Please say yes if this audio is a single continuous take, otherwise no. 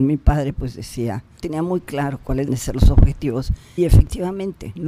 no